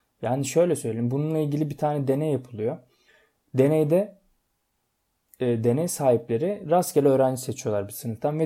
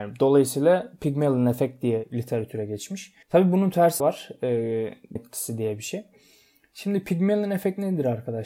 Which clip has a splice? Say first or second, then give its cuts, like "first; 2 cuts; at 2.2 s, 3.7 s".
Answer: second; 3 cuts; at 3.2 s, 4.0 s, 5.2 s